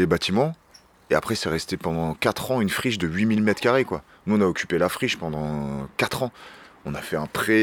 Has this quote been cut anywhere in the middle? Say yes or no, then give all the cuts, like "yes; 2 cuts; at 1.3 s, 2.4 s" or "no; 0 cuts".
no; 0 cuts